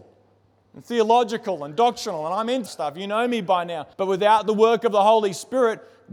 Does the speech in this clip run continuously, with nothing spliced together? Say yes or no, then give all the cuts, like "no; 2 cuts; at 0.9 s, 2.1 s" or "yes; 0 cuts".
no; 2 cuts; at 2.7 s, 3.9 s